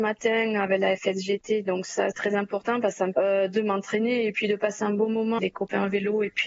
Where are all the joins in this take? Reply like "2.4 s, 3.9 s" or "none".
2.1 s, 3.1 s, 5.4 s